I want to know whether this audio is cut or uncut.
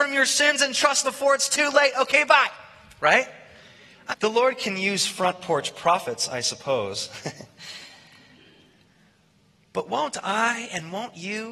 cut